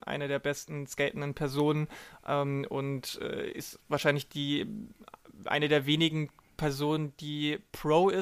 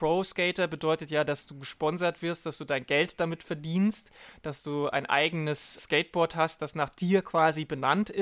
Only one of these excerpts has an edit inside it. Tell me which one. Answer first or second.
second